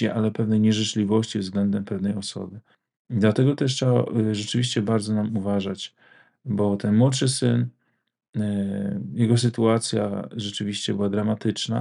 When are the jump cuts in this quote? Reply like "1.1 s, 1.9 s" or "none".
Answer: none